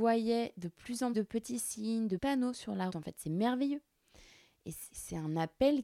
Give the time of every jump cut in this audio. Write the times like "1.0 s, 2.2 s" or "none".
1.1 s, 2.2 s, 2.9 s, 4.9 s